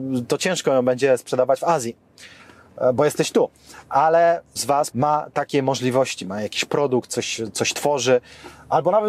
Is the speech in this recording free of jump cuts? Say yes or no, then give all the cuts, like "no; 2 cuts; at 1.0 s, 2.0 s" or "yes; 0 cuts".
no; 2 cuts; at 4.6 s, 4.9 s